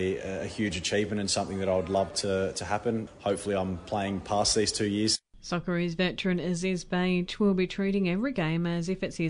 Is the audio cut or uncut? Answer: uncut